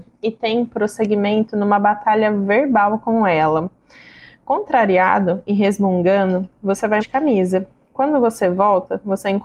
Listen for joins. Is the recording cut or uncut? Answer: cut